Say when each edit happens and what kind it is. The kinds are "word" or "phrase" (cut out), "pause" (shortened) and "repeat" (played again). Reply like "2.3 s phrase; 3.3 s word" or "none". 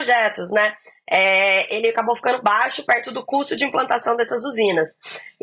none